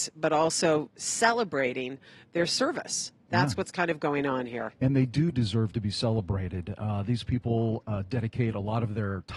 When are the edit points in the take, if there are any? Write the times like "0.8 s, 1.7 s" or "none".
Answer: none